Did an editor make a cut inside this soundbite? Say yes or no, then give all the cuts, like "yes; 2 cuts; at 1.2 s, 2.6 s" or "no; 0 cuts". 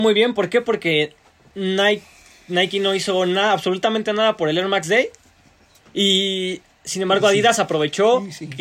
no; 0 cuts